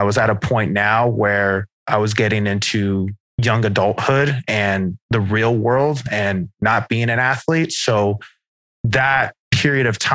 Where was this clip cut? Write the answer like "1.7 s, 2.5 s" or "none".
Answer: none